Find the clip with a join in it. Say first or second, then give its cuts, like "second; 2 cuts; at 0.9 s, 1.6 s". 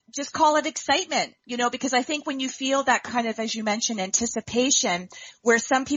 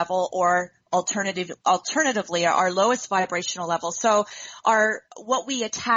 second; 1 cut; at 1.6 s